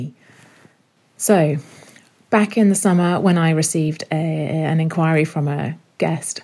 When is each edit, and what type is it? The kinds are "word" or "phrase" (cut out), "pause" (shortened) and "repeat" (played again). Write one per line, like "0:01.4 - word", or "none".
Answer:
none